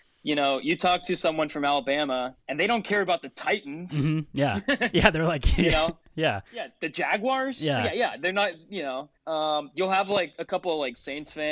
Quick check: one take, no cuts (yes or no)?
no